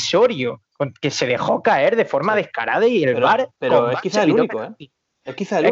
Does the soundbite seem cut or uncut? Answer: uncut